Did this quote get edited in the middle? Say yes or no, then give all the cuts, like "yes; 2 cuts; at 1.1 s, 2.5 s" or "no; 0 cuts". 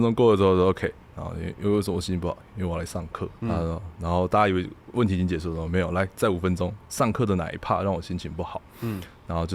yes; 2 cuts; at 3.4 s, 6.8 s